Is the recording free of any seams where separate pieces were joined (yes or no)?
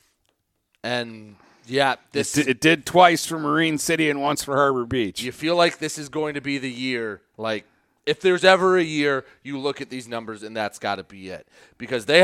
yes